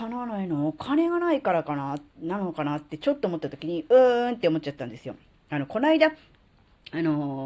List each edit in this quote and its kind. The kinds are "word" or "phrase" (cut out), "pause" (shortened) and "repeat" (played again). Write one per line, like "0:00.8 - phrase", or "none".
0:02.1 - pause

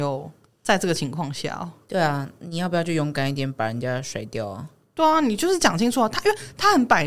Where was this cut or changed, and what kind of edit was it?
none

